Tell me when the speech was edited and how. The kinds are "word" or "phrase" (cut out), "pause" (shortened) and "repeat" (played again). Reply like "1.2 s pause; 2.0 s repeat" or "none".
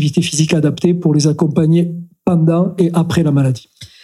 none